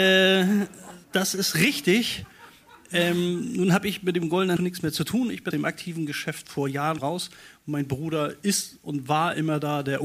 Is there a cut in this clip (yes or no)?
yes